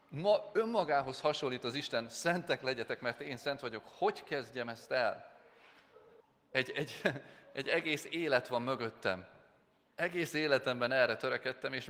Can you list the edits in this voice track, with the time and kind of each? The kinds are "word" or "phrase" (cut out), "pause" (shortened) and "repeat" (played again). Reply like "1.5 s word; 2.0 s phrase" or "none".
6.2 s pause